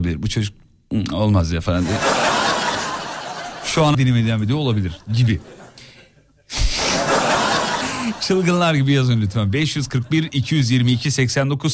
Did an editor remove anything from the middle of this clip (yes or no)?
yes